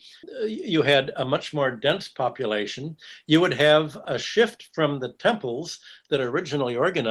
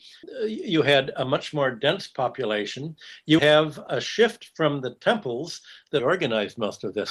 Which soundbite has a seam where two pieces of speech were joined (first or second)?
second